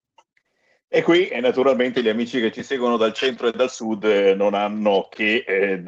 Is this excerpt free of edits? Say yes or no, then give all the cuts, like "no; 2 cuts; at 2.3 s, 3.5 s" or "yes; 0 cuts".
yes; 0 cuts